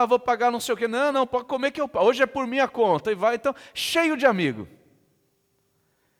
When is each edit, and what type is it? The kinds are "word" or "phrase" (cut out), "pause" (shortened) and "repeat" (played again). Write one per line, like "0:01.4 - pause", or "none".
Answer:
none